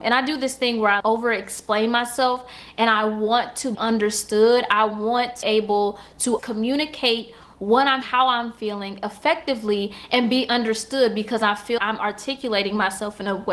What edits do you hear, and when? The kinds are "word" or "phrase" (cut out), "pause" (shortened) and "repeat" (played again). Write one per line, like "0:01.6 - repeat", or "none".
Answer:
0:01.0 - word
0:03.7 - word
0:05.4 - word
0:06.4 - word
0:08.0 - word
0:11.8 - word